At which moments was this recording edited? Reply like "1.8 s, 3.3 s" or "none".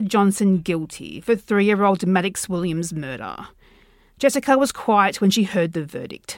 none